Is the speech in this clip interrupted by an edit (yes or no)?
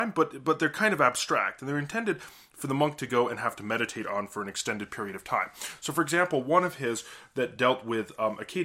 no